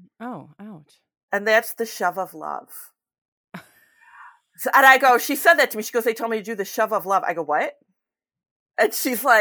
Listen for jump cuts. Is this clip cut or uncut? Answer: uncut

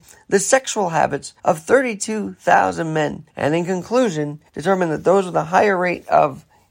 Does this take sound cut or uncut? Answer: cut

